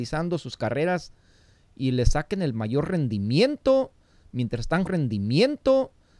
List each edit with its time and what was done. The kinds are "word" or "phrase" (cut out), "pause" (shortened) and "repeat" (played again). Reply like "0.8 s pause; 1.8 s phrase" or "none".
4.9 s repeat